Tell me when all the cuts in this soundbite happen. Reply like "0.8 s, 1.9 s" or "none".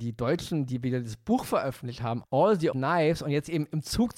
2.2 s, 2.7 s